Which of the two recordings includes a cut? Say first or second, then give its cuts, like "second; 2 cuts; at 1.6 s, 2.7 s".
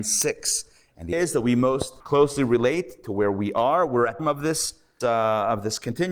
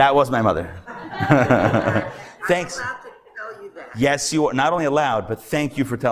first; 4 cuts; at 1.1 s, 2.0 s, 4.2 s, 5.0 s